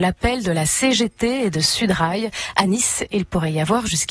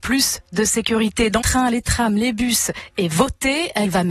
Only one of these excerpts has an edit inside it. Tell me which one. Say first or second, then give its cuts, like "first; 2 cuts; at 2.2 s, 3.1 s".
second; 1 cut; at 1.4 s